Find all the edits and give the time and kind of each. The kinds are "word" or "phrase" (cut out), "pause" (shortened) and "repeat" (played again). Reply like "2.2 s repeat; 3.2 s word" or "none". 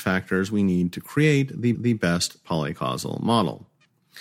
1.7 s repeat